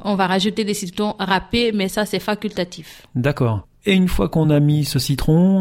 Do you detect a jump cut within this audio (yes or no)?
no